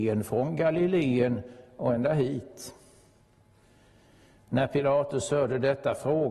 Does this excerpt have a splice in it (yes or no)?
no